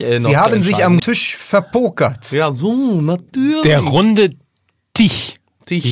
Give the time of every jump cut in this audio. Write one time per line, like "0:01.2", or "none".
0:01.0

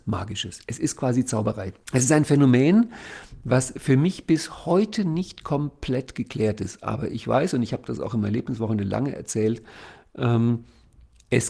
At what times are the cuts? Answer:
0:01.8

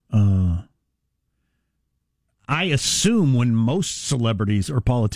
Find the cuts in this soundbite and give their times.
none

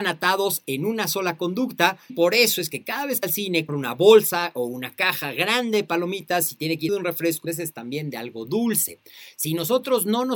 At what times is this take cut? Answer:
0:02.1
0:03.2
0:03.7
0:06.9
0:07.4

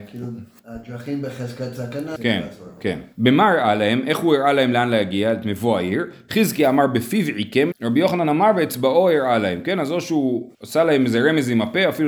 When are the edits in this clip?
0:02.2
0:03.1
0:07.7
0:10.5

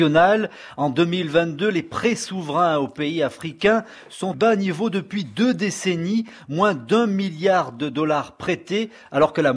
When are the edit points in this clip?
0:04.3

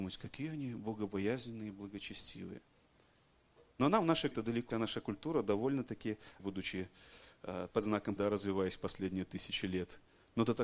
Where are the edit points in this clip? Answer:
0:04.3
0:04.7
0:06.4
0:07.7
0:08.2

